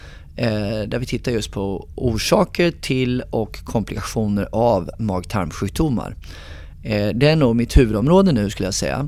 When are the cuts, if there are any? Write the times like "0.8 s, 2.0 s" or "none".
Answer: none